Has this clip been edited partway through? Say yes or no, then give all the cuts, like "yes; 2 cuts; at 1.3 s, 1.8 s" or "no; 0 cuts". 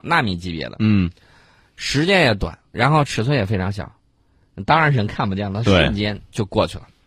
no; 0 cuts